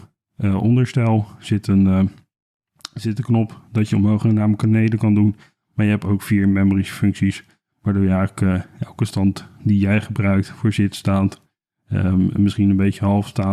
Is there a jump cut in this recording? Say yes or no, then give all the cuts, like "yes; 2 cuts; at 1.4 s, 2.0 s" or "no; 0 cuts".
no; 0 cuts